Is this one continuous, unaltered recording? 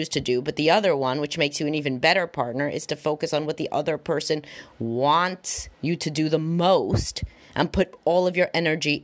no; 1 cut; at 5.7 s

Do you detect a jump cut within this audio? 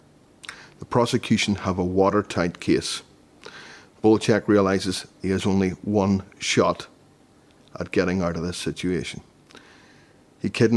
no; 0 cuts

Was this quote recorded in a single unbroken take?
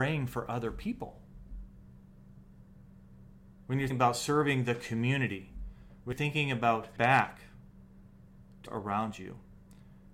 no; 4 cuts; at 3.9 s, 6.1 s, 7.0 s, 8.7 s

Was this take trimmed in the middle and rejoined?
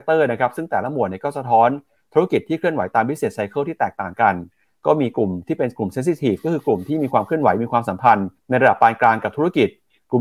yes; 1 cut; at 8.4 s

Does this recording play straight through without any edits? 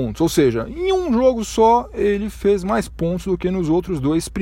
yes; 0 cuts

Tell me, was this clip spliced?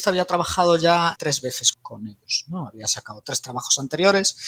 yes; 3 cuts; at 1.2 s, 1.7 s, 3.2 s

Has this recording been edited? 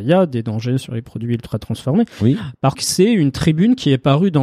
yes; 1 cut; at 2.7 s

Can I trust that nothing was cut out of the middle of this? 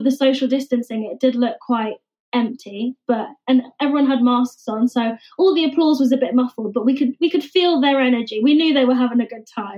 yes; 0 cuts

